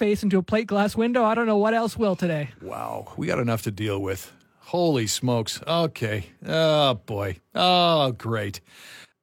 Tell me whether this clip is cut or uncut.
uncut